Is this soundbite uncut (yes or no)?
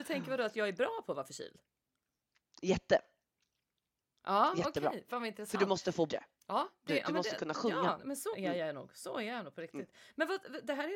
no